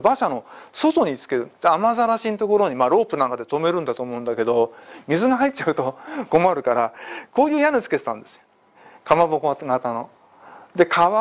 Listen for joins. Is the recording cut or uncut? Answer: cut